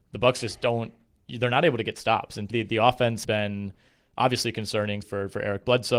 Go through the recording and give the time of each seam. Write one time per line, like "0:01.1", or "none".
0:02.5
0:03.2
0:05.0